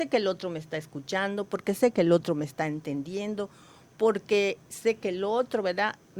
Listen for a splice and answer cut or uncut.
uncut